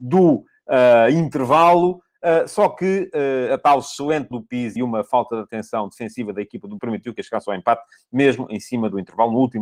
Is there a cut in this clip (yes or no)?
yes